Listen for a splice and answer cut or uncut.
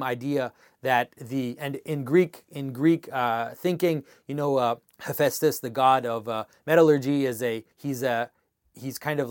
cut